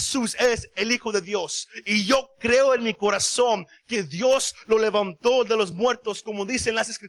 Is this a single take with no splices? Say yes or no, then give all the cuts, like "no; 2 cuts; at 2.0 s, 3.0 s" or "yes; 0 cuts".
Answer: yes; 0 cuts